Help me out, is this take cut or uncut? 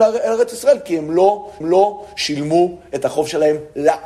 cut